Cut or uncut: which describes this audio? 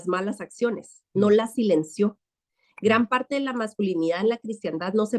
uncut